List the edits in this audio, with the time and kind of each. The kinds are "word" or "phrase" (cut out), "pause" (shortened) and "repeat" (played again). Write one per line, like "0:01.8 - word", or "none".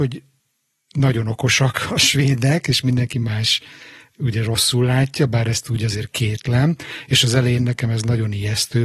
none